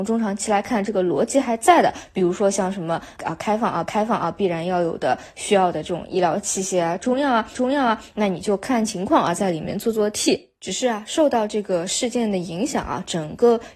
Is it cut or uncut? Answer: cut